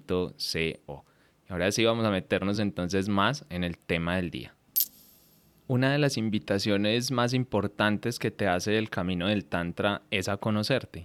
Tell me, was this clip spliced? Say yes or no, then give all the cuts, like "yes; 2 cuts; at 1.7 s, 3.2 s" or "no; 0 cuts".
no; 0 cuts